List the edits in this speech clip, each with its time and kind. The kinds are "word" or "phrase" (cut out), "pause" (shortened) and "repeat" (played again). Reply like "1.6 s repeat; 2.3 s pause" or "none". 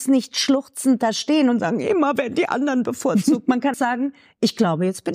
3.7 s word